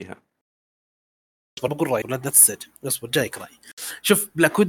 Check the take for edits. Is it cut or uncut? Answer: cut